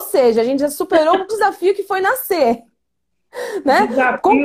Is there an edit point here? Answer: yes; 1 cut; at 1.3 s

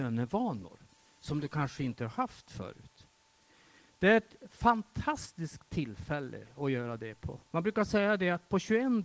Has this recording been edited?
yes; 1 cut; at 7.4 s

